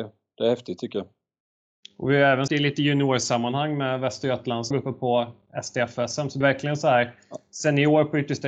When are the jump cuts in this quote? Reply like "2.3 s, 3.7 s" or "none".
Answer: 2.5 s, 4.7 s, 6.4 s